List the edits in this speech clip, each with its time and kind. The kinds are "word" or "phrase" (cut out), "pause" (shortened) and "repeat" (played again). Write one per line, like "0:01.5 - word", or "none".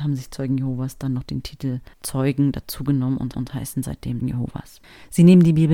0:01.9 - pause
0:03.3 - repeat
0:04.2 - word